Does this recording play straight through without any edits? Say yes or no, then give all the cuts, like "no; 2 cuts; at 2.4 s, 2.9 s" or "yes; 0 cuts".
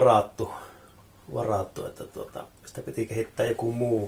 yes; 0 cuts